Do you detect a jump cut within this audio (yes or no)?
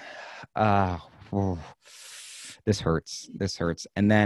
no